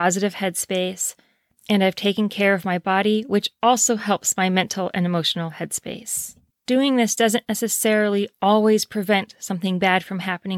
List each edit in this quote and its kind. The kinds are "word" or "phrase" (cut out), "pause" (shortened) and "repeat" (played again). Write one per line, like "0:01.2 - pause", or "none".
0:06.5 - pause